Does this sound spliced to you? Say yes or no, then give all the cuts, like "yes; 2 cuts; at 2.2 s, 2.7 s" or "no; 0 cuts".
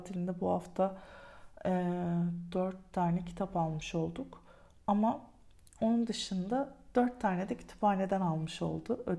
no; 0 cuts